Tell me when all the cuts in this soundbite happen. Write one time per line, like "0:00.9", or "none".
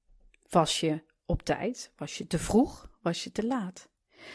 none